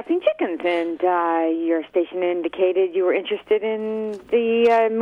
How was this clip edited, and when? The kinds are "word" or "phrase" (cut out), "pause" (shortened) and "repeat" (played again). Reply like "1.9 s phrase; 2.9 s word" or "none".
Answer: none